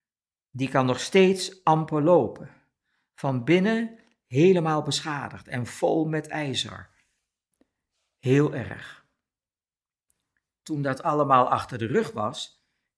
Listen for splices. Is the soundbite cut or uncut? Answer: uncut